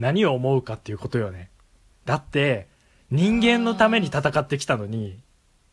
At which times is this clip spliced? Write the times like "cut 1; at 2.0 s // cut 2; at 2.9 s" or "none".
none

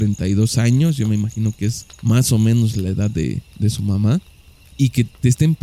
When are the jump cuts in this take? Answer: cut 1; at 1.9 s

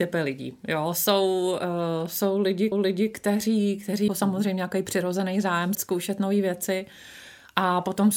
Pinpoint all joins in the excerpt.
cut 1; at 2.7 s // cut 2; at 4.1 s // cut 3; at 5.7 s

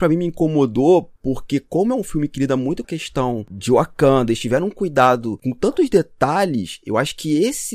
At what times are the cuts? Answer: cut 1; at 1.2 s // cut 2; at 2.8 s

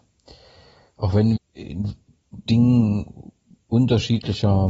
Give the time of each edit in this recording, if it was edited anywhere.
cut 1; at 1.4 s // cut 2; at 2.5 s

